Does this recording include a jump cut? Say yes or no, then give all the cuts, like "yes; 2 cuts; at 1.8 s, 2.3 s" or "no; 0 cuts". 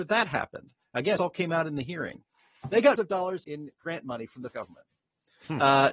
yes; 5 cuts; at 1.2 s, 3.0 s, 3.4 s, 3.8 s, 4.5 s